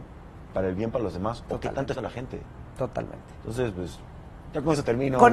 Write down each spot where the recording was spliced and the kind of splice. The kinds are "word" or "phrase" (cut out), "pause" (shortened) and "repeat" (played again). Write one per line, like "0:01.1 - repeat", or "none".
0:01.9 - phrase